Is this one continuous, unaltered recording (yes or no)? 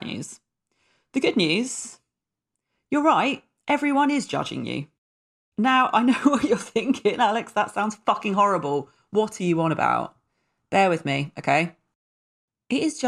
yes